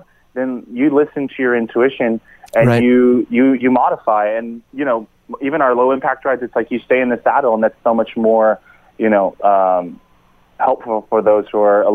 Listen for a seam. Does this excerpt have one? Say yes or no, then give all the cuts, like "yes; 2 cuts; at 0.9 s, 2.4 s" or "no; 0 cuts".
no; 0 cuts